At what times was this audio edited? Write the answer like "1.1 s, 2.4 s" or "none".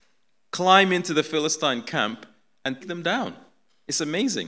2.8 s

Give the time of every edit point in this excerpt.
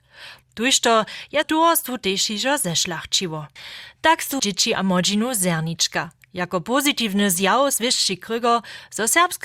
1.4 s, 4.4 s

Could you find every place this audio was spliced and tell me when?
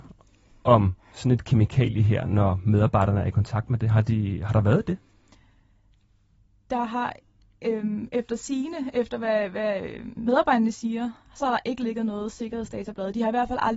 none

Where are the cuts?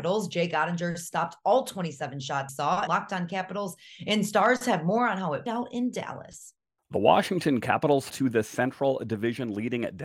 2.5 s, 2.9 s, 5.5 s, 6.8 s, 8.1 s

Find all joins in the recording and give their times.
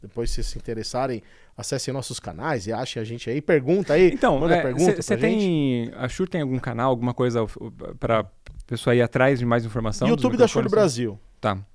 none

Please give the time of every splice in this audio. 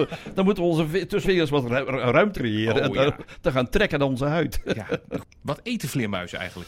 1.2 s, 2.3 s

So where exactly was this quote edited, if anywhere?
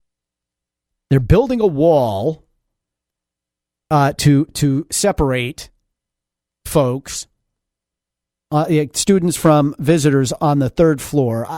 none

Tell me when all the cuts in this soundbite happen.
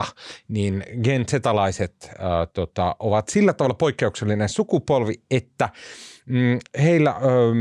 none

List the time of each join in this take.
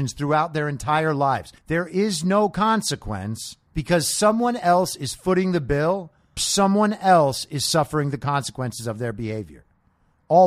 1.6 s, 3.7 s, 6.4 s

